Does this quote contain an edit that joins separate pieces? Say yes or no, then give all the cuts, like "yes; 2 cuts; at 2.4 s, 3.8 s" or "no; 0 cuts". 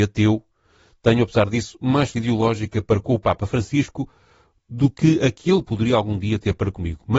yes; 1 cut; at 2.1 s